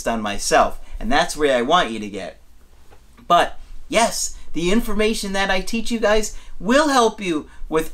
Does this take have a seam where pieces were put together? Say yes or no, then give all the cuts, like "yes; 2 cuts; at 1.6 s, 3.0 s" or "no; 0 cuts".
no; 0 cuts